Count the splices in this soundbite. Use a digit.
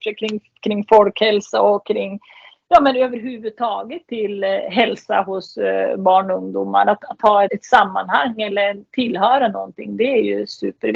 2